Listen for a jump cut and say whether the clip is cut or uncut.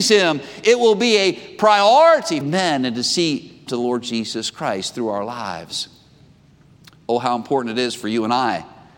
cut